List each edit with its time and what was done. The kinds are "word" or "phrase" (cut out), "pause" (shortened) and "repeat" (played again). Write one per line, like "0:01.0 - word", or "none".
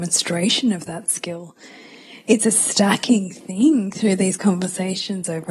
none

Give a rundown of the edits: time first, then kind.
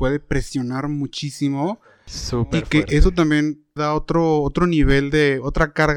0:03.8 - word

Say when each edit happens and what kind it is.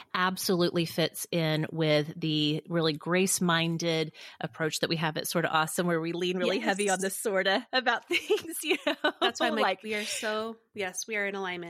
none

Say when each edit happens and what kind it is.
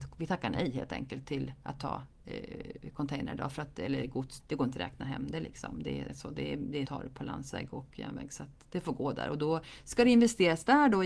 0:04.4 - phrase
0:06.1 - word
0:06.8 - phrase

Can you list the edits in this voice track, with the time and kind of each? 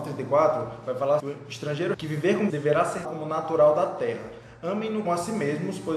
0:01.2 - word
0:01.9 - word
0:02.5 - word
0:03.0 - word
0:05.0 - word

